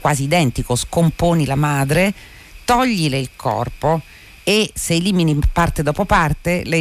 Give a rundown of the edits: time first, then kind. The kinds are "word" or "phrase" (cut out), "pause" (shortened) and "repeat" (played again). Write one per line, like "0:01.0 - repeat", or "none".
none